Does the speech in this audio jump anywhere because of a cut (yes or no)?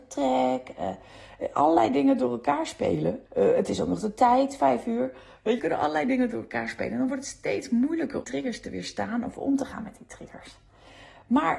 yes